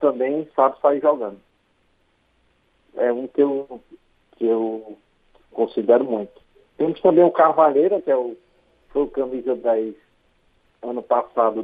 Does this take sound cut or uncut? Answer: cut